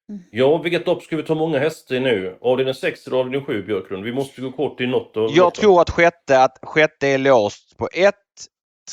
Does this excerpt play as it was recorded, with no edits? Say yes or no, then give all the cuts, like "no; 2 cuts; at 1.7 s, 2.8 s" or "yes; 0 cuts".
yes; 0 cuts